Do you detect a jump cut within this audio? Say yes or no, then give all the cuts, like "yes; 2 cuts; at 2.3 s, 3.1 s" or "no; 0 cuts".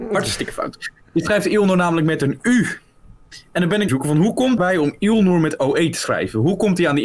yes; 2 cuts; at 3.9 s, 4.6 s